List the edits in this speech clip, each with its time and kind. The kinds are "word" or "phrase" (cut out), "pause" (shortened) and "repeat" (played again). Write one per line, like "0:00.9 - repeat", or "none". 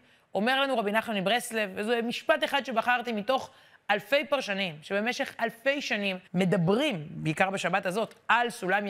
0:06.3 - pause